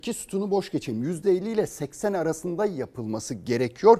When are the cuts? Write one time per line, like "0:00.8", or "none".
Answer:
none